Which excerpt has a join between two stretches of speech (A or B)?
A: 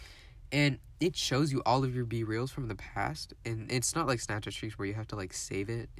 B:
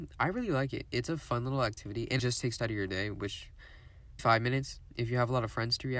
B